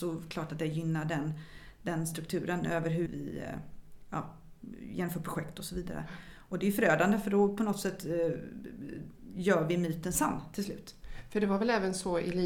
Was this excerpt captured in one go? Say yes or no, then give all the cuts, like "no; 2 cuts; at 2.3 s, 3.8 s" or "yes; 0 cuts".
no; 1 cut; at 3.1 s